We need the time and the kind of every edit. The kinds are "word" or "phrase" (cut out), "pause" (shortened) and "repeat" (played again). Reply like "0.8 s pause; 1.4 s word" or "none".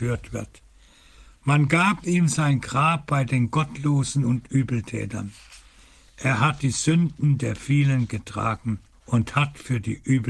8.9 s pause